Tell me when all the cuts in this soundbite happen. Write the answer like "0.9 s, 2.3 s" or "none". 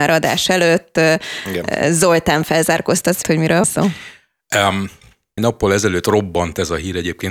3.2 s, 3.6 s, 5.4 s

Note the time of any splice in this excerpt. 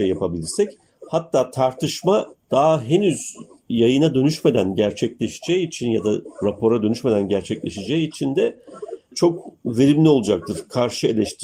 none

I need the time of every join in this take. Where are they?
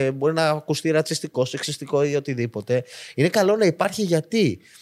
none

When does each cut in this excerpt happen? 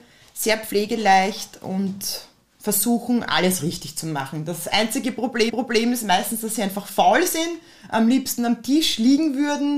5.5 s

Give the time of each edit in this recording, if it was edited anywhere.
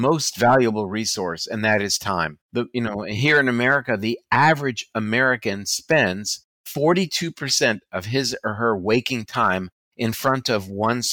2.4 s

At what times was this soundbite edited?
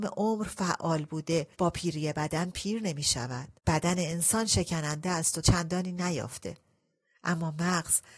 1.5 s, 3.6 s, 5.4 s

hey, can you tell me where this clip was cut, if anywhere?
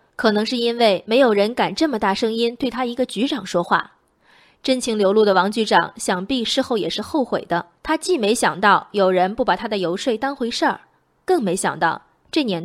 7.8 s

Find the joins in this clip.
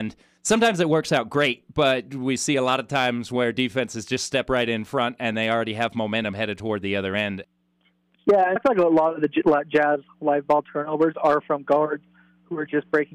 8.6 s

